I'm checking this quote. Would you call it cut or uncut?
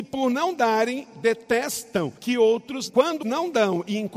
cut